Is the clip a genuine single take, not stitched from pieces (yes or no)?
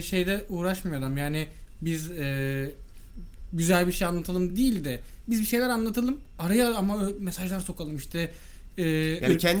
yes